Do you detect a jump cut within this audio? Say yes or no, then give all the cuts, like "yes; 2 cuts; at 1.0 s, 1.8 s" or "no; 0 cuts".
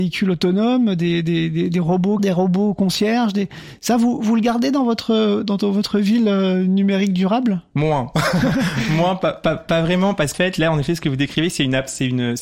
yes; 2 cuts; at 2.2 s, 10.3 s